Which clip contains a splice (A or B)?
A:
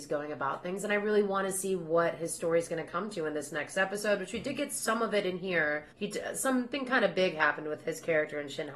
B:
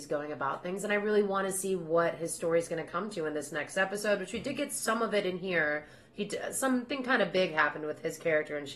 A